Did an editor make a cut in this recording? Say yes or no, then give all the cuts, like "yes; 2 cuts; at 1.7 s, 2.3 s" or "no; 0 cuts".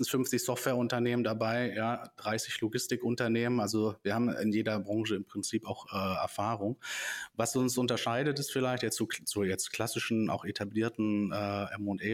no; 0 cuts